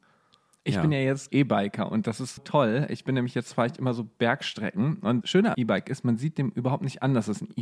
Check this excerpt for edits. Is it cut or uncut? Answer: cut